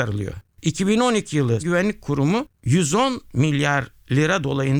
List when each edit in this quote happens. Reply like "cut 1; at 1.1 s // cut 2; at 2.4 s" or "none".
cut 1; at 1.6 s